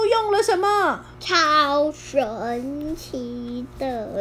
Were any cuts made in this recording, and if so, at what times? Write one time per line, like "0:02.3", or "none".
0:01.1